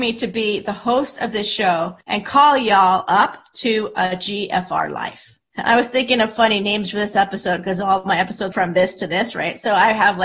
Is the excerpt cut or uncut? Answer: cut